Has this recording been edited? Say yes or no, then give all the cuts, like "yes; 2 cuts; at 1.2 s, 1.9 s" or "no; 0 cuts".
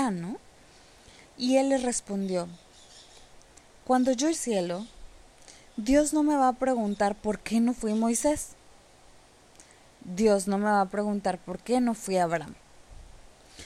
yes; 1 cut; at 4.3 s